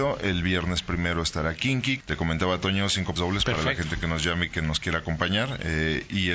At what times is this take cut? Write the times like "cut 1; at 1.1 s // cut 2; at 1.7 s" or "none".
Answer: cut 1; at 2.0 s // cut 2; at 3.2 s